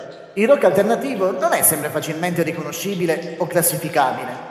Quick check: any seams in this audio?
no; 0 cuts

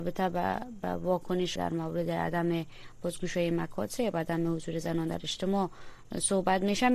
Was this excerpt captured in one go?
no; 1 cut; at 1.6 s

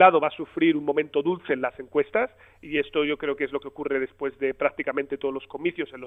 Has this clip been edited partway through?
no; 0 cuts

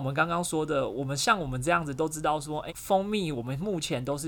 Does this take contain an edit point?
yes; 1 cut; at 2.7 s

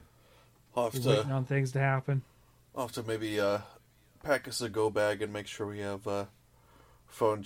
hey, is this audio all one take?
yes; 0 cuts

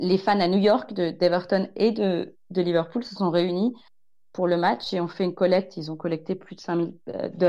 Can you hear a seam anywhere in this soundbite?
no; 0 cuts

